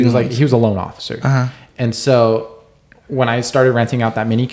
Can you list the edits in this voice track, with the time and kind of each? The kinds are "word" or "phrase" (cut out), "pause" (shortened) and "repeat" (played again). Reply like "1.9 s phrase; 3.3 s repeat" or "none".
none